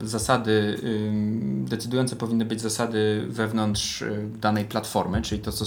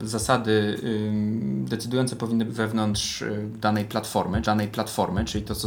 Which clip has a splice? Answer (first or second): second